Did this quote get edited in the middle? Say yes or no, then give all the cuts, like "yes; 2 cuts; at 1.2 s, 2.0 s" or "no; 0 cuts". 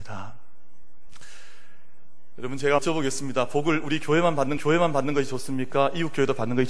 yes; 2 cuts; at 2.8 s, 4.6 s